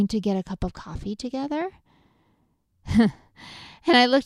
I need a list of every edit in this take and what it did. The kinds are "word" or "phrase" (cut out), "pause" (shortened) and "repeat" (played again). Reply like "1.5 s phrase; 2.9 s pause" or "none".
none